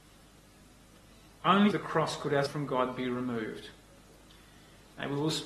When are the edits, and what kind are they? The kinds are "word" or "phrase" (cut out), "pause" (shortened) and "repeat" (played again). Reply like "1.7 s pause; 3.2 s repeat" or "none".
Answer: 1.7 s word; 2.5 s word